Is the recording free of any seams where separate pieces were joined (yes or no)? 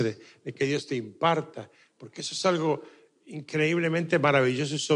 yes